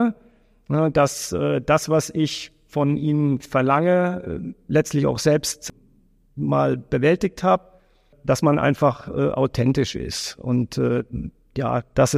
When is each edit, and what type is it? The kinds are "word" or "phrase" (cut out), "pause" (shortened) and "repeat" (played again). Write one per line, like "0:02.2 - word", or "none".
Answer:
none

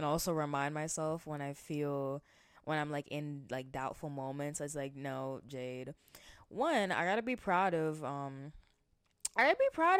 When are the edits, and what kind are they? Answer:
none

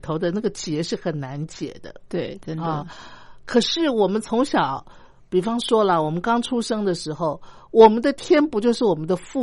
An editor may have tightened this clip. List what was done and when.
none

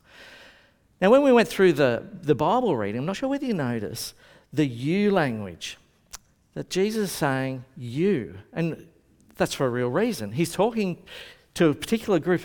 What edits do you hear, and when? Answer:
none

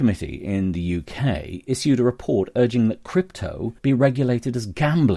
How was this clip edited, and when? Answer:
0:03.8 - pause

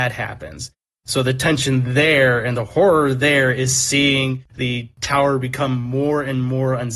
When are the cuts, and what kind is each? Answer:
none

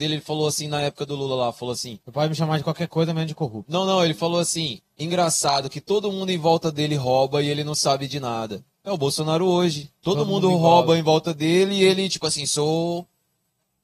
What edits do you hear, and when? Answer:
0:02.0 - pause

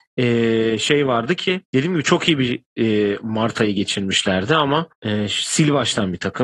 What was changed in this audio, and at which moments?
0:01.6 - pause
0:04.9 - pause

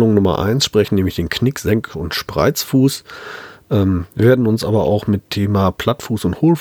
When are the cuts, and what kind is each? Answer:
none

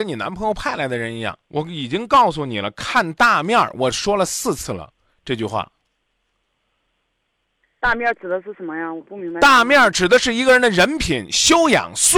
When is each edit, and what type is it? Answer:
0:01.4 - pause

